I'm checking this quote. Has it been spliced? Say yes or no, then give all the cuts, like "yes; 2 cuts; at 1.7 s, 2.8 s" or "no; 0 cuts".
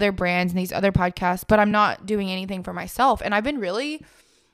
no; 0 cuts